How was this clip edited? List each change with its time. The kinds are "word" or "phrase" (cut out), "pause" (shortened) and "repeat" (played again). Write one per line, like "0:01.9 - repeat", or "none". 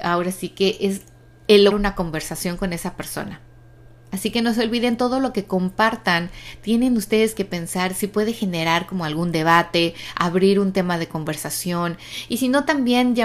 0:01.7 - phrase